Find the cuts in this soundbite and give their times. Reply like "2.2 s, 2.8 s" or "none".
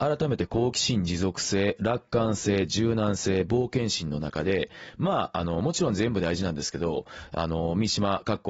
none